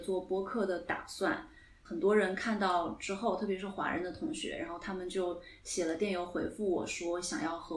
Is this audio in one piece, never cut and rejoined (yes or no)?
yes